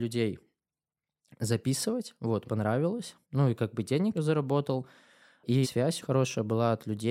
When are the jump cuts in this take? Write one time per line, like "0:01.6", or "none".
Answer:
0:02.4
0:03.2
0:04.1
0:05.6
0:06.0